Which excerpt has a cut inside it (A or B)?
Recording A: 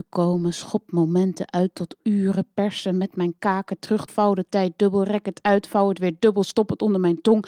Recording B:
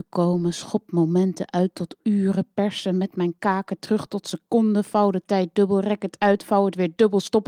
A